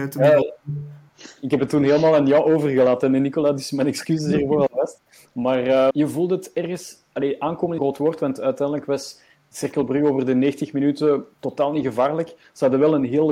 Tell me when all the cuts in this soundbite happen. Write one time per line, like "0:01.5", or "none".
0:05.9
0:07.8
0:11.3